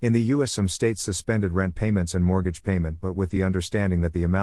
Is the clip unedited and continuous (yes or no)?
yes